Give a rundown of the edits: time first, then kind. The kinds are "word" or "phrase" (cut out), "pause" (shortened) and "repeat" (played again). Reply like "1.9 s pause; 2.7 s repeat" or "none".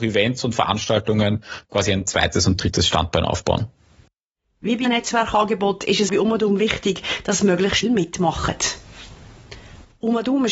4.8 s word; 6.1 s word; 7.8 s word